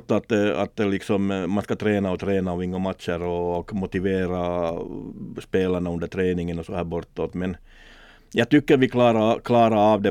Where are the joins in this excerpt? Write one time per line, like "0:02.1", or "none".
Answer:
none